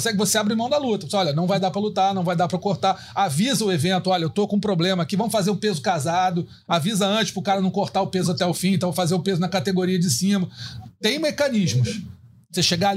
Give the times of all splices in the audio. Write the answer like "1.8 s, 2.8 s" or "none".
none